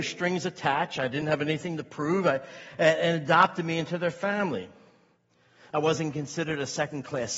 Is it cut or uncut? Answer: uncut